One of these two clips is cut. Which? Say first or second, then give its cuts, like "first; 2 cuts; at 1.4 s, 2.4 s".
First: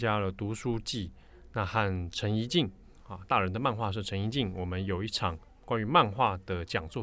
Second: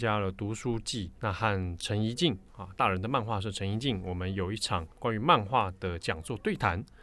second; 3 cuts; at 1.2 s, 2.5 s, 4.9 s